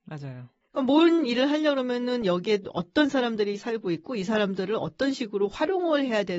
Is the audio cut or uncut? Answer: uncut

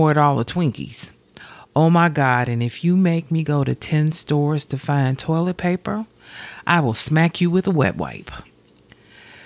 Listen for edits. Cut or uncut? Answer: uncut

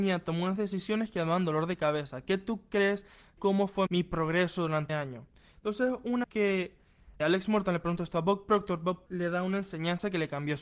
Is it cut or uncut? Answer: cut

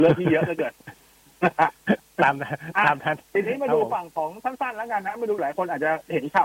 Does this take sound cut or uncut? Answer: cut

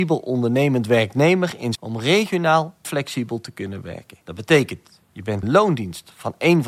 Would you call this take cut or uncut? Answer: cut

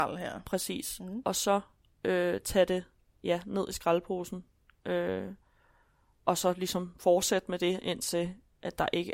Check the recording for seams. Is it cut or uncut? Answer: uncut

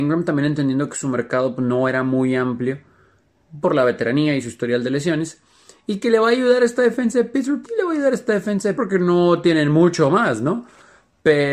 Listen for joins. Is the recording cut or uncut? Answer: cut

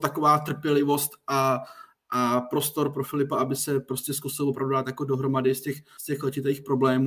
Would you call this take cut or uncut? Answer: uncut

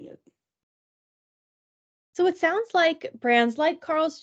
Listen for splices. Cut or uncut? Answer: uncut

